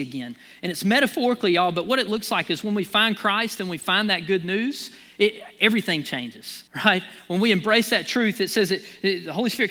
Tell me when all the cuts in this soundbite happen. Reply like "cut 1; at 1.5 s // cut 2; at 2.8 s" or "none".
cut 1; at 6.7 s